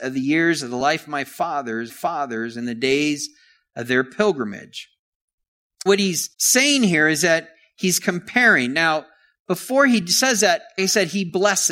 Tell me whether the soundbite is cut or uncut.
cut